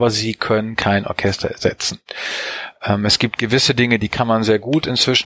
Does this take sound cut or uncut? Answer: uncut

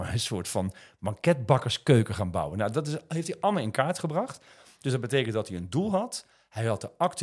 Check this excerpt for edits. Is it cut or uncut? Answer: uncut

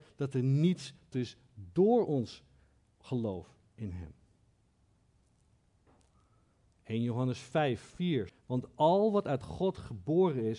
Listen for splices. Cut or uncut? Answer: cut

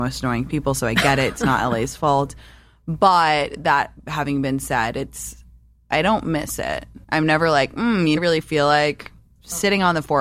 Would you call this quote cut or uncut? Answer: cut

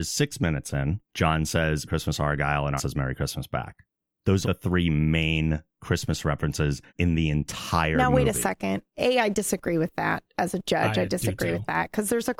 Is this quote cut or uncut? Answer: cut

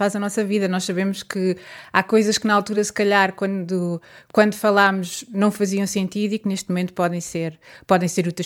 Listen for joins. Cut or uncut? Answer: uncut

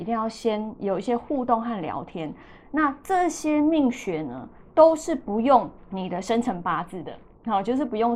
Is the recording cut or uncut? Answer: cut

